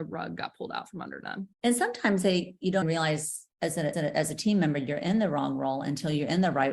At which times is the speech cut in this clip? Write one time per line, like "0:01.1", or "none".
0:01.5
0:02.8
0:03.5
0:03.9